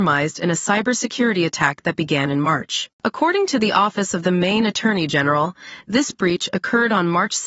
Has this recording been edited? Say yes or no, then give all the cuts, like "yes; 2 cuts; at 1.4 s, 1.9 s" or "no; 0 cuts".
no; 0 cuts